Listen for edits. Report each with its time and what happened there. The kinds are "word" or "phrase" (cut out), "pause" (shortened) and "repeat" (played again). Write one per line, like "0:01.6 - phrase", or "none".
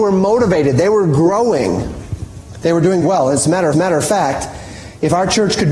0:03.0 - word
0:03.7 - repeat

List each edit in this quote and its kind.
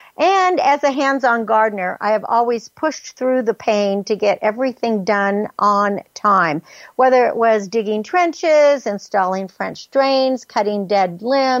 none

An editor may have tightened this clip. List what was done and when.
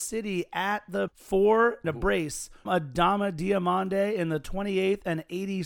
0:01.1 - word
0:01.8 - phrase
0:02.7 - word

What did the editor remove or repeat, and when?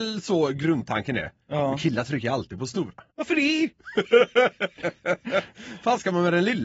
0:03.1 - pause

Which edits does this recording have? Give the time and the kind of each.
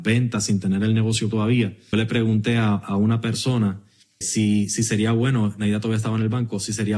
0:01.3 - word
0:01.9 - word
0:04.2 - word

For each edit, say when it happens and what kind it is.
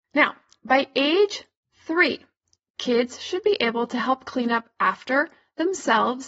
none

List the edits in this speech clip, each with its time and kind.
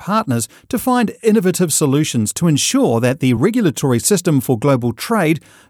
none

